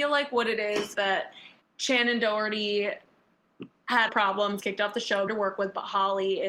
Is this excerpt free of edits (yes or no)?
no